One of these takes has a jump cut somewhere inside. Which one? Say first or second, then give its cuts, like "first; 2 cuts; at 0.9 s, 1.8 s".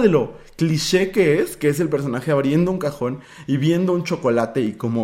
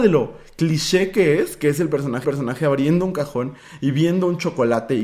second; 1 cut; at 2.2 s